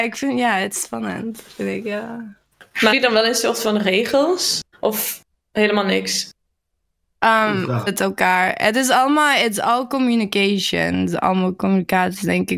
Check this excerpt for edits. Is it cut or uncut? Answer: cut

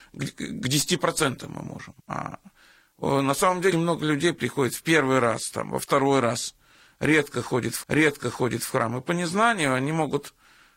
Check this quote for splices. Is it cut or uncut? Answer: cut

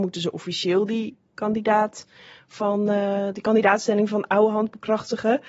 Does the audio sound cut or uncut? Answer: uncut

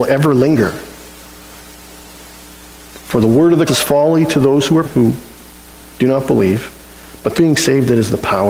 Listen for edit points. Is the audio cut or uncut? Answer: cut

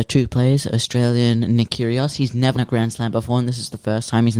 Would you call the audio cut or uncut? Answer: cut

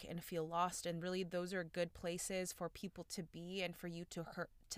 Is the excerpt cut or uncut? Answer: uncut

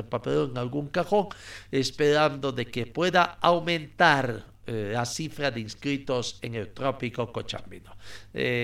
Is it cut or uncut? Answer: cut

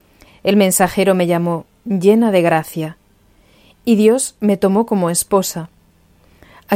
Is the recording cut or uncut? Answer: uncut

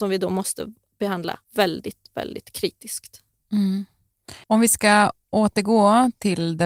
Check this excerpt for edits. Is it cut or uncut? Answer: cut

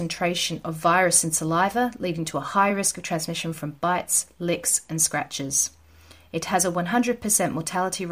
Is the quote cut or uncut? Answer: uncut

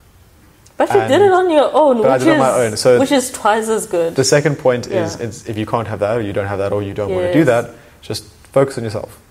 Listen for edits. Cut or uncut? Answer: uncut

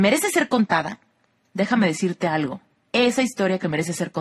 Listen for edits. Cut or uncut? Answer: uncut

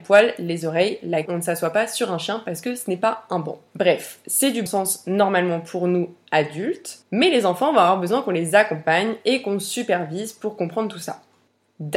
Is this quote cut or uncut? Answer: cut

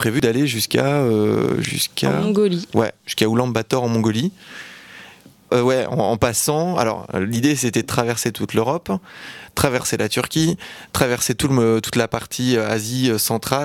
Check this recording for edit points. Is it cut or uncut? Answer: cut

